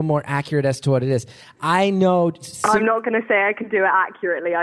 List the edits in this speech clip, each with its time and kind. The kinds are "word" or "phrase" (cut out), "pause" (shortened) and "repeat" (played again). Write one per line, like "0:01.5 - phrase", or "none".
none